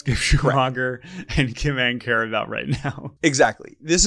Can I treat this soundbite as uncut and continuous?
no; 1 cut; at 3.2 s

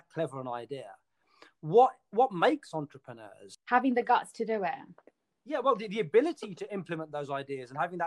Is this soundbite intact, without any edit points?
yes; 0 cuts

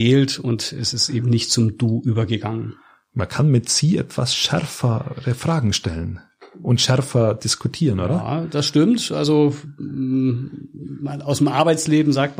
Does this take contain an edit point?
no; 0 cuts

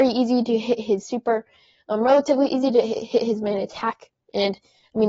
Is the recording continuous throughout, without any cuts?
yes; 0 cuts

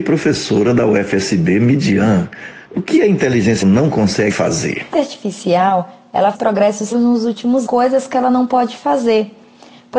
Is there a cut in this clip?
yes; 7 cuts; at 2.6 s, 3.6 s, 4.3 s, 4.9 s, 6.3 s, 6.9 s, 7.7 s

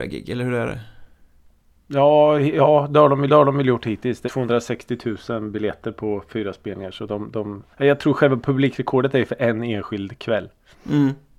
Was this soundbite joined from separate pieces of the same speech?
yes; 3 cuts; at 3.3 s, 4.3 s, 7.7 s

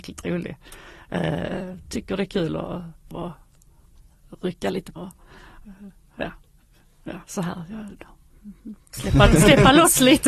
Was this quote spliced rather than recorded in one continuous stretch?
yes; 2 cuts; at 3.1 s, 5.0 s

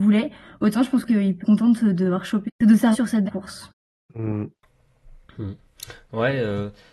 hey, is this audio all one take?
no; 5 cuts; at 1.1 s, 1.4 s, 2.5 s, 2.9 s, 3.3 s

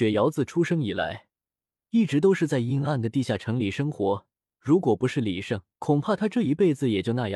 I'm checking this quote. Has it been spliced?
yes; 2 cuts; at 4.4 s, 5.7 s

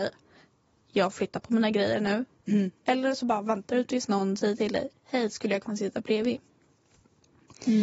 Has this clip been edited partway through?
no; 0 cuts

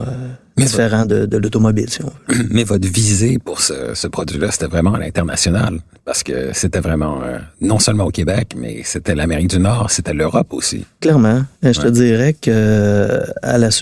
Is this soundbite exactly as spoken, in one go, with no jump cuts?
yes; 0 cuts

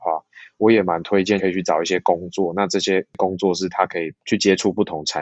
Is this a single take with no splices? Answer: no; 1 cut; at 4.2 s

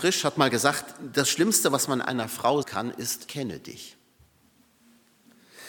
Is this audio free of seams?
no; 2 cuts; at 2.6 s, 3.3 s

